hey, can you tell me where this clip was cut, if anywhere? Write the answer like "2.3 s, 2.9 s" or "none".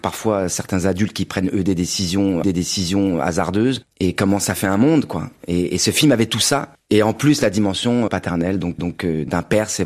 2.4 s, 8.1 s, 8.8 s

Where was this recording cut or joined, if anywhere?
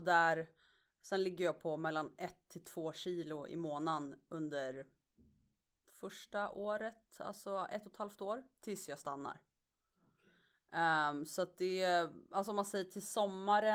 12.2 s

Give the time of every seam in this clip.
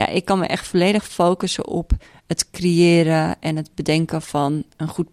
none

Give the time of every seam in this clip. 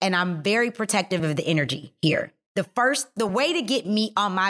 none

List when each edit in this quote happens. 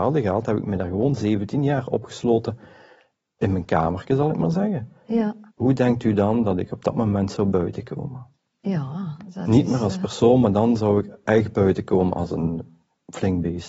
5.5 s

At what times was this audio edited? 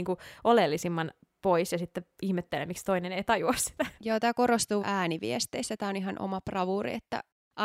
4.8 s

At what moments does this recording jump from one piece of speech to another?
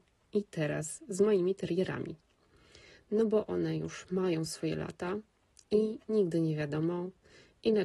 none

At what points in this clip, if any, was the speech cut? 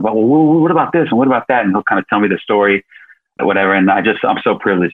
3.4 s

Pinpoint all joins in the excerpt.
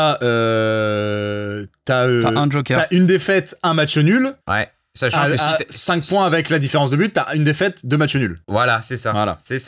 4.4 s, 8.4 s

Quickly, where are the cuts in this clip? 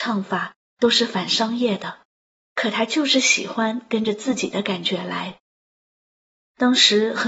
none

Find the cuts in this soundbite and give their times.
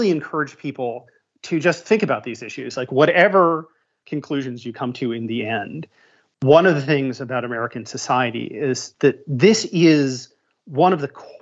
8.9 s

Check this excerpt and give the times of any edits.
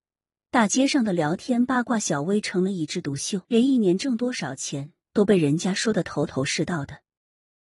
3.4 s

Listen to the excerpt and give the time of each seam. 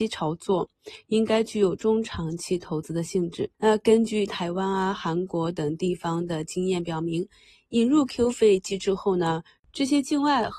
3.5 s

